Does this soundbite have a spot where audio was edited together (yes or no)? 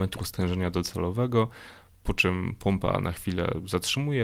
no